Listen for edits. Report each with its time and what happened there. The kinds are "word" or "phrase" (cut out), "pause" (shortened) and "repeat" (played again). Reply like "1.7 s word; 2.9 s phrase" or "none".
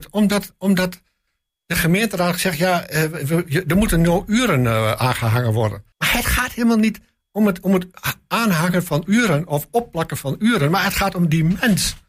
5.9 s pause

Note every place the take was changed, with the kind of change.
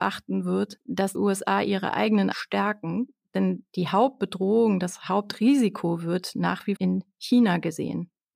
1.1 s word; 2.3 s word; 6.8 s word

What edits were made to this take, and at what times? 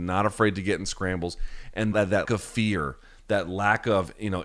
1.9 s word; 2.3 s word

